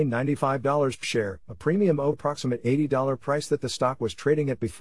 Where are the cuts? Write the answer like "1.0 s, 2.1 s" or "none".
1.0 s, 2.1 s